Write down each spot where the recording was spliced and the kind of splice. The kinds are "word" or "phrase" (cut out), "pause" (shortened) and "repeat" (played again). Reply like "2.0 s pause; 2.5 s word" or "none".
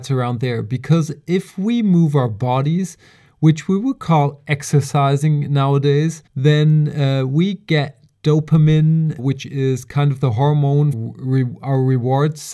6.3 s pause; 9.2 s word; 10.9 s word